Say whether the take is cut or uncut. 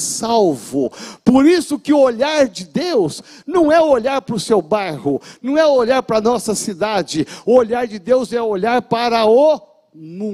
uncut